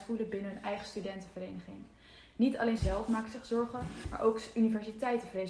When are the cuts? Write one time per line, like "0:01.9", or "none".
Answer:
0:02.8